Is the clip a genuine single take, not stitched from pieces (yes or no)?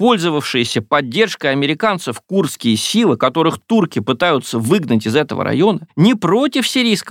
yes